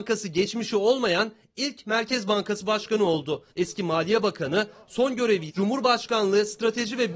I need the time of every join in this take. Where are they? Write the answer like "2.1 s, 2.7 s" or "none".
3.5 s, 5.5 s